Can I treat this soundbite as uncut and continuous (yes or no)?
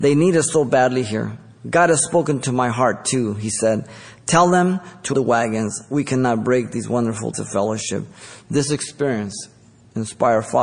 no